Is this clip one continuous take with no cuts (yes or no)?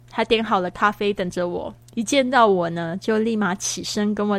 no